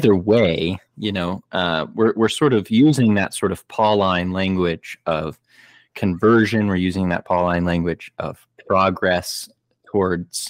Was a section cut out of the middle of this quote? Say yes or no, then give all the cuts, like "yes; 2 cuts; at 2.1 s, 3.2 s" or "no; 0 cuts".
no; 0 cuts